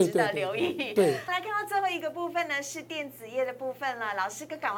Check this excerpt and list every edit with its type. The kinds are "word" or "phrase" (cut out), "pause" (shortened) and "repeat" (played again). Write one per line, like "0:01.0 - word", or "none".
0:01.3 - word